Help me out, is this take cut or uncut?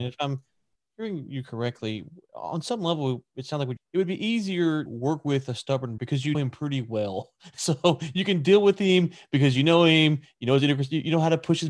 cut